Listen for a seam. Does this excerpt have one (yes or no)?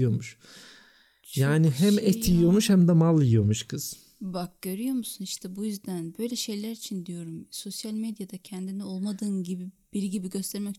no